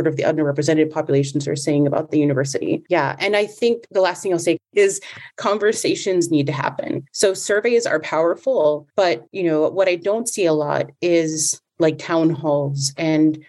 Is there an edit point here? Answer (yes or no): yes